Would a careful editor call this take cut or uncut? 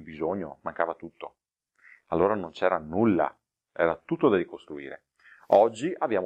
uncut